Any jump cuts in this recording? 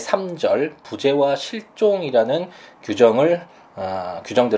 no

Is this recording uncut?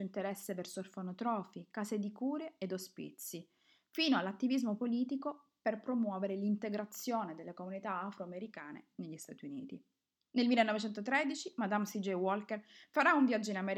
yes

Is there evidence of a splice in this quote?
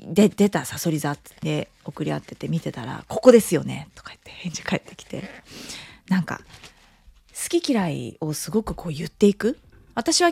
yes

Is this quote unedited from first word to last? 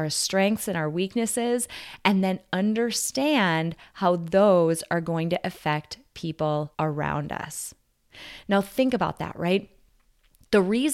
no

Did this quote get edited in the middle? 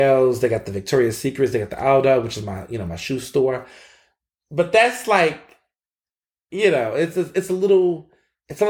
no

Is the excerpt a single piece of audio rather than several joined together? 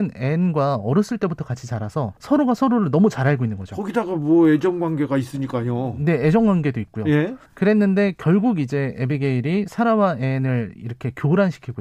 no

